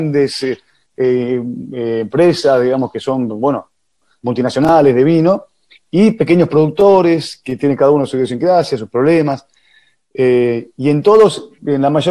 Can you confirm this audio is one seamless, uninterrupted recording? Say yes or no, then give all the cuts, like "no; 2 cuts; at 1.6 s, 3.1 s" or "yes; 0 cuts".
yes; 0 cuts